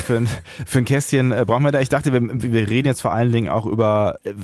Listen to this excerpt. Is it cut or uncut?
uncut